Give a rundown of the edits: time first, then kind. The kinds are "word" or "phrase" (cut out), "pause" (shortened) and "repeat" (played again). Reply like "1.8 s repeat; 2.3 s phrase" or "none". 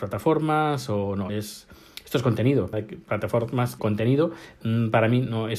1.3 s word; 2.7 s word; 3.8 s word; 4.6 s word